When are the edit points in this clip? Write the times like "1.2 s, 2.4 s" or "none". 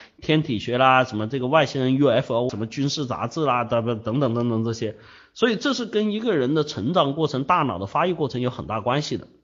2.5 s